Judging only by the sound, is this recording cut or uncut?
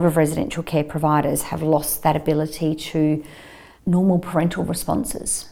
uncut